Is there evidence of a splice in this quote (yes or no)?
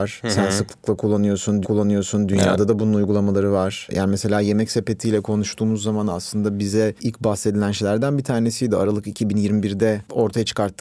yes